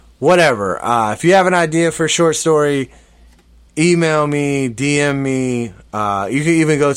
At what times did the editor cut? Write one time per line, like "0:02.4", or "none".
none